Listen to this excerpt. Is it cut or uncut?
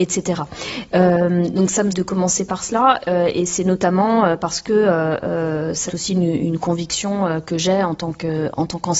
cut